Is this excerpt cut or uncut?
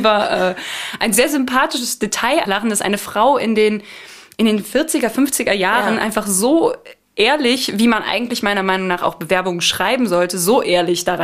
cut